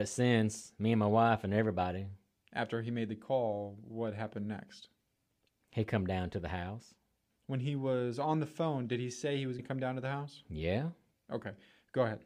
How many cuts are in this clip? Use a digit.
1